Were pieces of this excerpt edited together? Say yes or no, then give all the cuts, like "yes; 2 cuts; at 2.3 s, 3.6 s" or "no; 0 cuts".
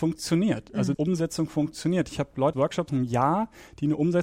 yes; 3 cuts; at 0.9 s, 2.5 s, 2.9 s